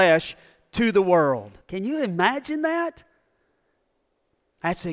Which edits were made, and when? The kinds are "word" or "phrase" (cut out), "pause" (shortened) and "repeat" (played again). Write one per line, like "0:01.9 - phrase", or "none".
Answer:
0:01.6 - pause